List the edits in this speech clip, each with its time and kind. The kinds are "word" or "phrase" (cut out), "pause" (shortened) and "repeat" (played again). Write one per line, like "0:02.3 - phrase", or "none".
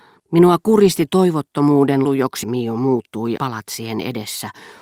0:01.1 - word
0:02.0 - word
0:02.4 - word
0:03.4 - word